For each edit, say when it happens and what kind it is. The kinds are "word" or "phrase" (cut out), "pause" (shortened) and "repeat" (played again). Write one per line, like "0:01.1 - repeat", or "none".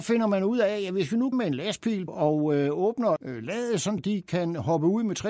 0:01.3 - word
0:02.1 - word
0:03.2 - word
0:04.0 - word